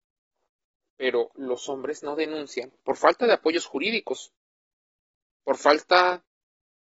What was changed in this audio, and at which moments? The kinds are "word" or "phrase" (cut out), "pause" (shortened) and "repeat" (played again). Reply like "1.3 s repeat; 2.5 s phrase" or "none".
2.8 s pause

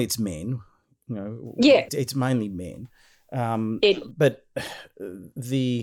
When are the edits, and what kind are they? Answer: 1.9 s word

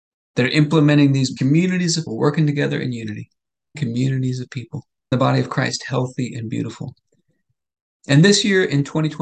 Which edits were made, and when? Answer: 1.4 s word; 2.1 s word; 3.7 s word; 5.1 s word

